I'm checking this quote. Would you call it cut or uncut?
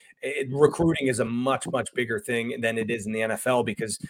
uncut